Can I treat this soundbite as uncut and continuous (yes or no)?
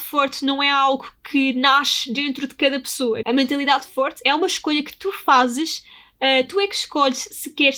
no